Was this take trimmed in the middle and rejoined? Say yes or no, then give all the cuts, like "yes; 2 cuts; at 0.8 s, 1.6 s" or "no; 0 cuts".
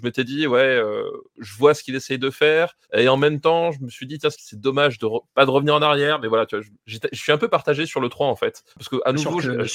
yes; 4 cuts; at 2.8 s, 4.3 s, 6.8 s, 8.7 s